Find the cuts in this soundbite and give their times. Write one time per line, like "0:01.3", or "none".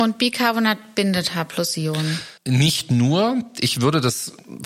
0:02.4